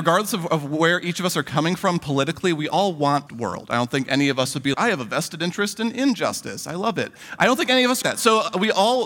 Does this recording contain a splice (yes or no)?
yes